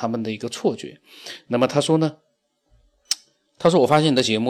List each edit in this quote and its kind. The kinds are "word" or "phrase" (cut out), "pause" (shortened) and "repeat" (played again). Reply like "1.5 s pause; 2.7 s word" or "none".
none